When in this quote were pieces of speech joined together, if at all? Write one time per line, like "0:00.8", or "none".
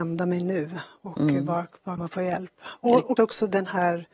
0:02.0
0:03.2